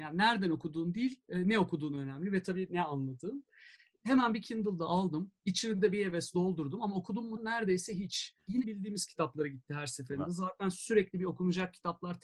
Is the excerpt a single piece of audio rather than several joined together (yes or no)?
no